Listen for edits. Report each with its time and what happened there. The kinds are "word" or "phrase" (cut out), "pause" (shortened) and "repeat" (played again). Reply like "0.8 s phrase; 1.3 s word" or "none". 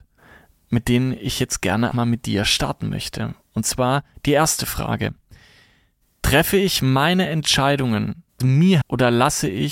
1.9 s word; 8.4 s word; 8.8 s word